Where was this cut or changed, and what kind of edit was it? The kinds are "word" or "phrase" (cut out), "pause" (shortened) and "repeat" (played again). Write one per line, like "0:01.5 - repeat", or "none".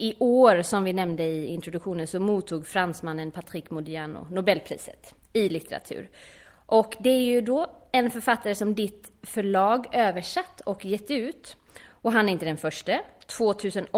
none